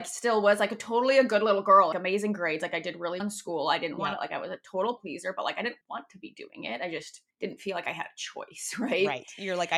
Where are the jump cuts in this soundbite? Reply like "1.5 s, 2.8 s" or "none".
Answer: 1.9 s, 3.2 s, 5.0 s, 5.8 s, 7.3 s